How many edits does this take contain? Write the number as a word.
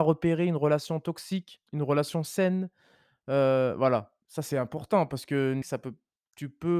three